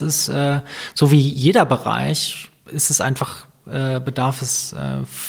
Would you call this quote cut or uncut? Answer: uncut